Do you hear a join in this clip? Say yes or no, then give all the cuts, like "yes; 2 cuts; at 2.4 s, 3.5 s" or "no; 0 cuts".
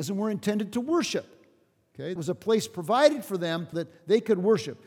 yes; 2 cuts; at 2.2 s, 3.7 s